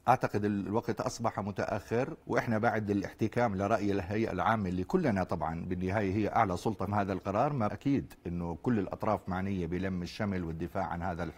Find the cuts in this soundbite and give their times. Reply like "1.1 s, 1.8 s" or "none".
2.2 s, 6.9 s, 7.7 s

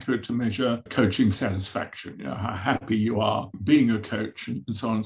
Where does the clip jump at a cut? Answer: none

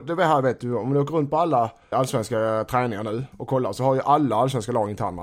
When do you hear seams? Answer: 1.9 s

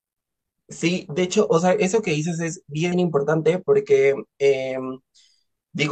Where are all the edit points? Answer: 2.9 s

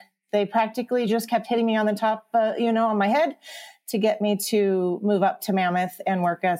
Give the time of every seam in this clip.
none

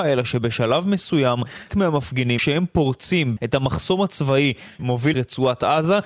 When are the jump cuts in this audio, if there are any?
1.7 s, 2.4 s, 3.4 s, 4.8 s, 5.1 s

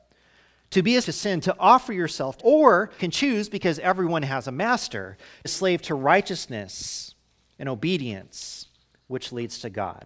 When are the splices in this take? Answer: 1.0 s, 2.4 s, 3.0 s, 5.4 s

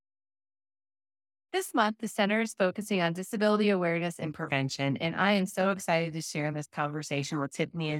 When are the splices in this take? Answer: none

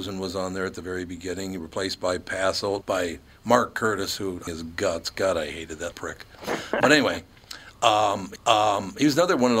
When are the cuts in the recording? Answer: 2.8 s, 4.5 s, 5.9 s, 8.4 s

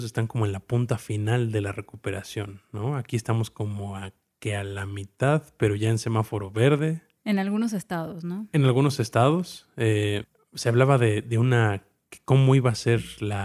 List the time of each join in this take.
none

